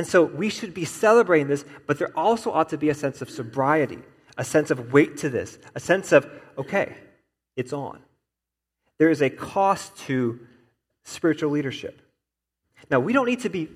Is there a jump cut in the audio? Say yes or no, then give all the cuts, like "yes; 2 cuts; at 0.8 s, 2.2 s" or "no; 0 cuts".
no; 0 cuts